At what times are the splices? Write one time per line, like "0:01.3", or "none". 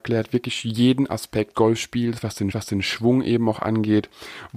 0:01.5
0:02.5